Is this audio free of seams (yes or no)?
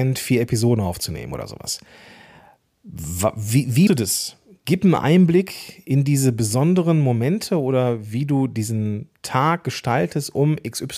no